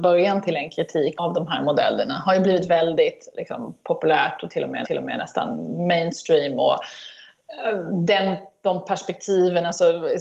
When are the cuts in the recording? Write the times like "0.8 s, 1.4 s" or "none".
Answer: 1.2 s, 4.8 s